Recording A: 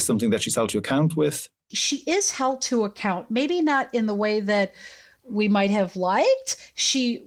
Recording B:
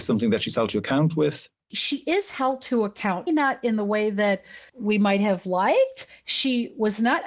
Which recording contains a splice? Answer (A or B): B